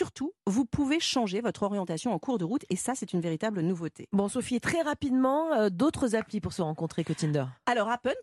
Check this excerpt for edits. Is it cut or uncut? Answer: uncut